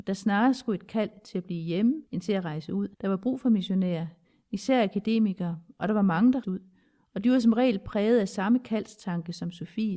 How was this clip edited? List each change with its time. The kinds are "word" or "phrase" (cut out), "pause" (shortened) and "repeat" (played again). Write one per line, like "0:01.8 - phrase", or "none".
0:02.1 - pause
0:02.9 - pause
0:06.4 - word